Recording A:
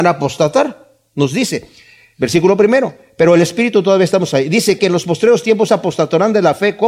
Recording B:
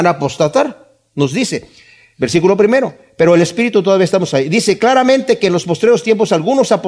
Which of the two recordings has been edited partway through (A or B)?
A